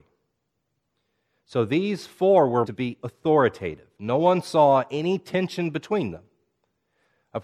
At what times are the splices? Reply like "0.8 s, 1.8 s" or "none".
2.6 s, 3.0 s